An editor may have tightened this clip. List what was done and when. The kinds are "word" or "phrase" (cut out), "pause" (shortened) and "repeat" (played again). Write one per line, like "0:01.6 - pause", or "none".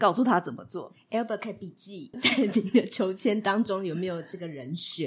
0:02.1 - phrase